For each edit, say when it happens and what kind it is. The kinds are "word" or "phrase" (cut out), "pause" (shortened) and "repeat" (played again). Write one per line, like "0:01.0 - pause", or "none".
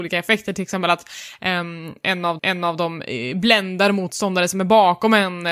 0:02.4 - repeat